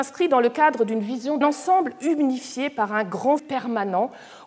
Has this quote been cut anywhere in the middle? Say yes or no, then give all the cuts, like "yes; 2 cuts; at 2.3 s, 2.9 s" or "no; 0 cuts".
yes; 2 cuts; at 1.4 s, 3.4 s